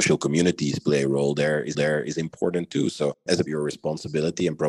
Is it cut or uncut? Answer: cut